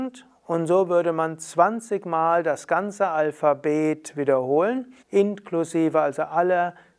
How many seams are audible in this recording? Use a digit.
1